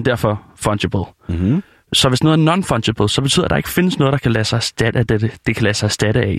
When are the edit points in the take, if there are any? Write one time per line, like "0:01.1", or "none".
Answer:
none